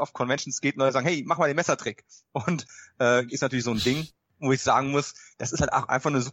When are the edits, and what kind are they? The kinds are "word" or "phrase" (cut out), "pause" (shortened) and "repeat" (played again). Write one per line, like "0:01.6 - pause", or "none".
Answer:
0:03.3 - phrase